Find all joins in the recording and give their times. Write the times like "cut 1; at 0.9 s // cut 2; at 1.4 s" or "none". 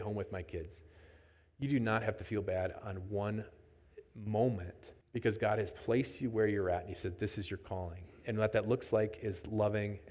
cut 1; at 5.0 s